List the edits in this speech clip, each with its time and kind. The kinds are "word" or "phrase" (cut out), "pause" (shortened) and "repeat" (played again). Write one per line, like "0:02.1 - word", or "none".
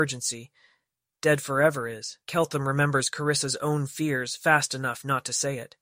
0:02.2 - pause